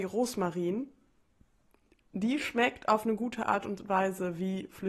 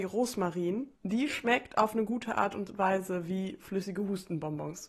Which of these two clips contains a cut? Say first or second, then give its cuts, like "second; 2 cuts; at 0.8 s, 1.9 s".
second; 1 cut; at 0.9 s